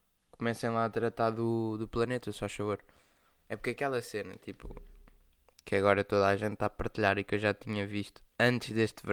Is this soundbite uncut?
yes; 0 cuts

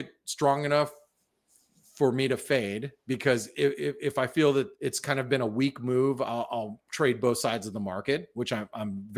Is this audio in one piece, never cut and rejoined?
no; 1 cut; at 4.7 s

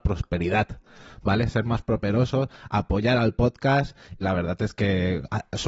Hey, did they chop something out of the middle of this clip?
yes; 1 cut; at 4.2 s

